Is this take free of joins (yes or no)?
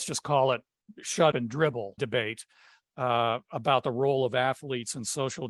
no